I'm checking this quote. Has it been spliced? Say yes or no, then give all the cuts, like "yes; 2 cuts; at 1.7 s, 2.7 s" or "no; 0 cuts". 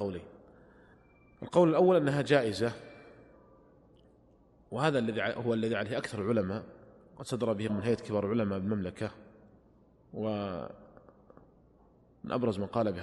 yes; 1 cut; at 7.7 s